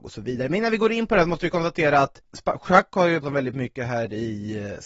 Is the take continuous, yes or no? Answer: no